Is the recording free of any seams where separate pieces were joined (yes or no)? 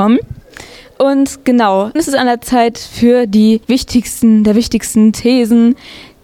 no